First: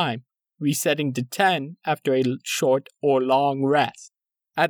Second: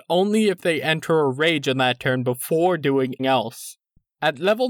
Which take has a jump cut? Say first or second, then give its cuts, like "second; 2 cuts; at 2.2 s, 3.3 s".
second; 1 cut; at 3.2 s